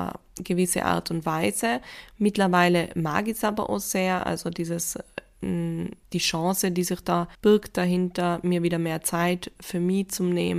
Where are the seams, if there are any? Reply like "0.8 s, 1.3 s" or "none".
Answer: 6.0 s, 7.3 s